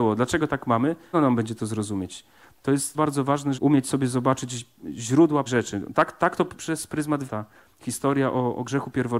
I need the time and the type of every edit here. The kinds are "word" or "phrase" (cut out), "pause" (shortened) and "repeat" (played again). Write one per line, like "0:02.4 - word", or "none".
0:01.1 - word
0:02.9 - word
0:03.5 - word
0:05.5 - word
0:06.5 - word
0:07.3 - word